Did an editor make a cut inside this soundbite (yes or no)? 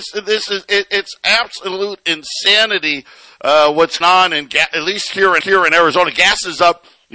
yes